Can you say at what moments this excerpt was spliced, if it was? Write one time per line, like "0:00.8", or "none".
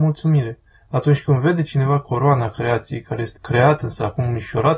0:03.3